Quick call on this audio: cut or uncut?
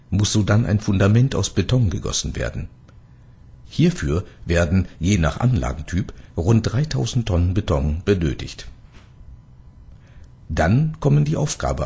uncut